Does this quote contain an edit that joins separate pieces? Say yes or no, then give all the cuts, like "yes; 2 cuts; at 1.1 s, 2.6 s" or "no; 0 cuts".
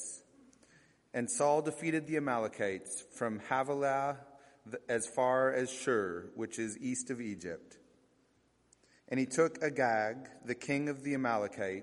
no; 0 cuts